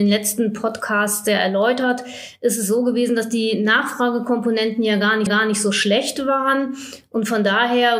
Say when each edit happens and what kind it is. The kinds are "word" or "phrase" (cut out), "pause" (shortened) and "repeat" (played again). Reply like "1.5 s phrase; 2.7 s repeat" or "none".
5.3 s repeat